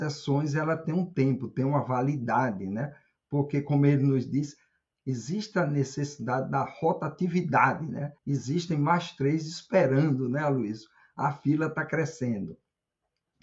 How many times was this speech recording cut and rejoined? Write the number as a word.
one